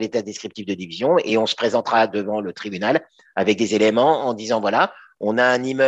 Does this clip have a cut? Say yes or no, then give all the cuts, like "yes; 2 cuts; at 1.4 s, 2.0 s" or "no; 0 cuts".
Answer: no; 0 cuts